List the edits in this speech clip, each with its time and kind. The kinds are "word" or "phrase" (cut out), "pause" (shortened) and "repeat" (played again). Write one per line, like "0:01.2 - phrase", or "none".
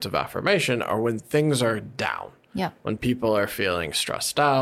none